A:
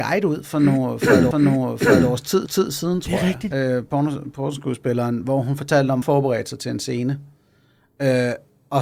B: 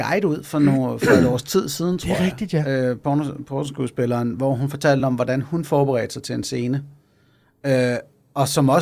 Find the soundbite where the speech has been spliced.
A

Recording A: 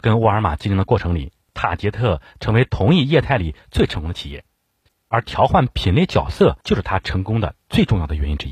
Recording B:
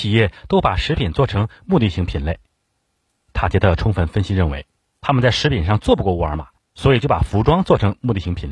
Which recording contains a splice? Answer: A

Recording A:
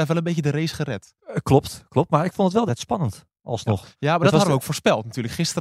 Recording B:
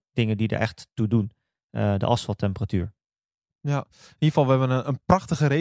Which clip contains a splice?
A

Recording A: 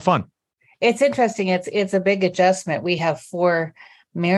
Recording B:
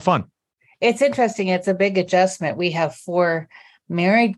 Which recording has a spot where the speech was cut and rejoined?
B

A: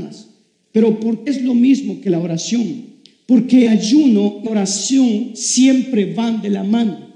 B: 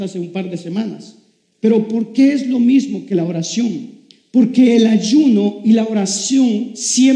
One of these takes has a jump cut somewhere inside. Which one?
A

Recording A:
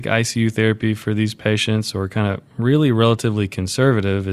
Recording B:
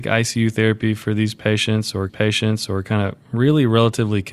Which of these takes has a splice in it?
B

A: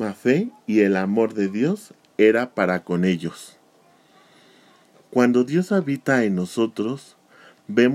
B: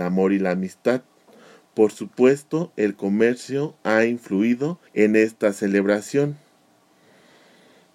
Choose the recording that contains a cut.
B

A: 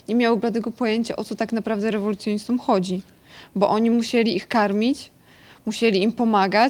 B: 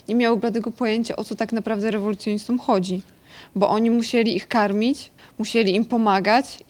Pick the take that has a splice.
B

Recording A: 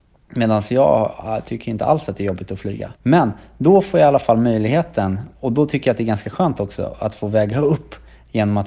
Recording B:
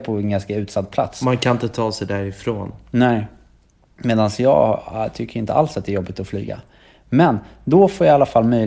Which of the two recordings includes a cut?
A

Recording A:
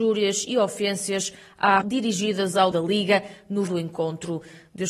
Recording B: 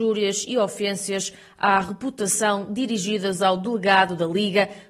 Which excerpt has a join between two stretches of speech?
A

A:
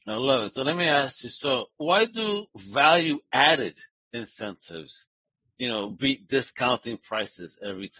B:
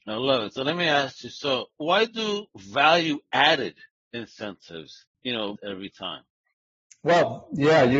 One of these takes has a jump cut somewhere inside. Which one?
B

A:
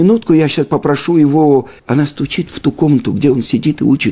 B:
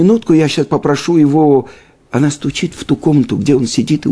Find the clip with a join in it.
A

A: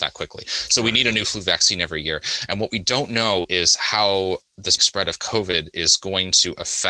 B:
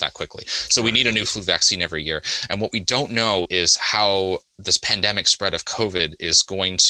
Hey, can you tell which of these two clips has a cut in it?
A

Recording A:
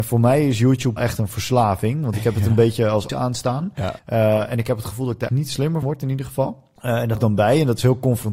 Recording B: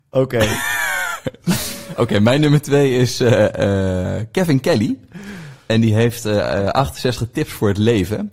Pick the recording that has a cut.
A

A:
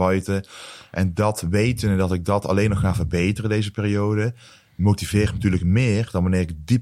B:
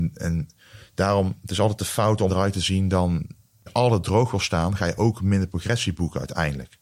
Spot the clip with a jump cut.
B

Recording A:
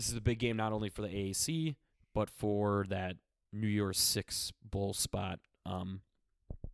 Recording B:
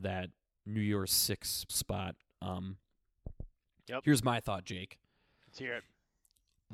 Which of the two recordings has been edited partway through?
B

